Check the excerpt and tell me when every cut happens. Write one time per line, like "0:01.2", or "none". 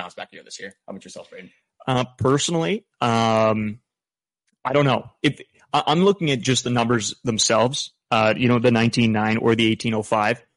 none